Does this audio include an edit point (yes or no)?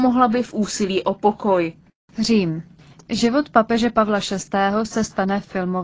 no